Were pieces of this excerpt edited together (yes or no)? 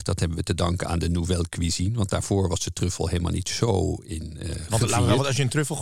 no